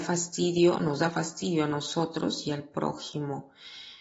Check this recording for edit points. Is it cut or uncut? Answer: uncut